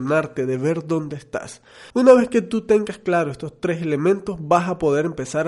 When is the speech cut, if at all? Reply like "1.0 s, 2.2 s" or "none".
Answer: 1.9 s